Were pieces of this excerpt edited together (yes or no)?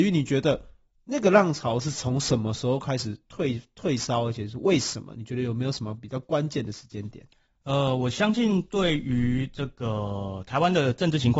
no